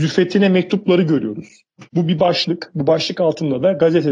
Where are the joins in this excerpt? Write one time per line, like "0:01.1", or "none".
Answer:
0:01.9